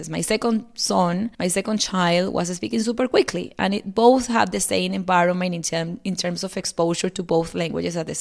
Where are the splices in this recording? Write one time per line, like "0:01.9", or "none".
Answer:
0:01.3